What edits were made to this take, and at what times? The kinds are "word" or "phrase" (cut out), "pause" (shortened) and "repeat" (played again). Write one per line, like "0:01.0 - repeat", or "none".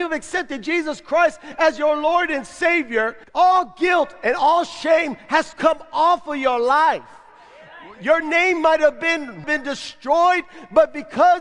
0:03.2 - pause
0:05.5 - word
0:09.4 - phrase